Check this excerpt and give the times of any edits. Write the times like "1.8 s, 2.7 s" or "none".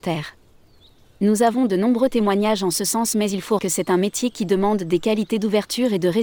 3.6 s